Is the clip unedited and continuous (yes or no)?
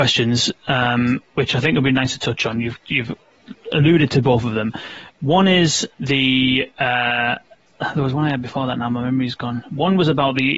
no